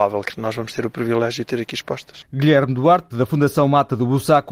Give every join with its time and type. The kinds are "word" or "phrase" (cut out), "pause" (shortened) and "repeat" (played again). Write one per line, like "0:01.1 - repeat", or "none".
0:03.1 - word